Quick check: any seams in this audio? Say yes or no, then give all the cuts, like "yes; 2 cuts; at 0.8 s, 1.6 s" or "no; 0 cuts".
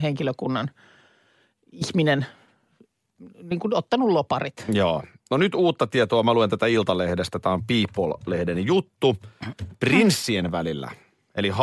no; 0 cuts